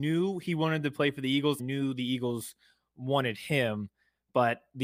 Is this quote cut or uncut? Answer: cut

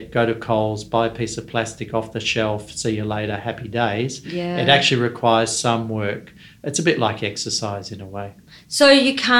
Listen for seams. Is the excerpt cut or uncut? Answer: uncut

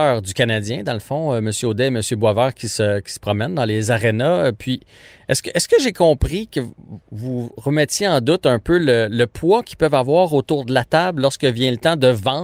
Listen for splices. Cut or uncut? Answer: uncut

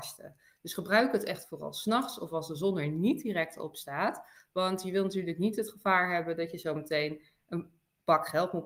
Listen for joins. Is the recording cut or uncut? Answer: uncut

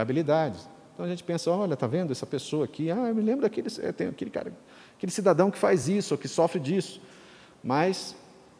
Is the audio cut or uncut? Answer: uncut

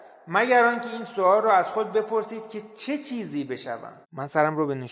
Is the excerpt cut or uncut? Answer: cut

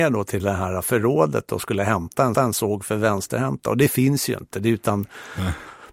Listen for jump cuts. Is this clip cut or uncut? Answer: cut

